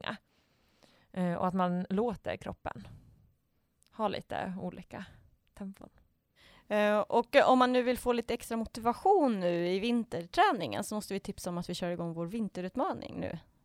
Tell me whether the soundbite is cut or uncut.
uncut